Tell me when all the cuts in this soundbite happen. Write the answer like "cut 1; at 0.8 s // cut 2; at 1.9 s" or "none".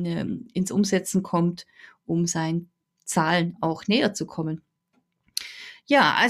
none